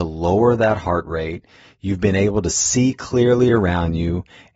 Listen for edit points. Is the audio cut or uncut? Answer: uncut